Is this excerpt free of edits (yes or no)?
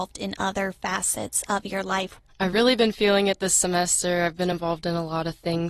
yes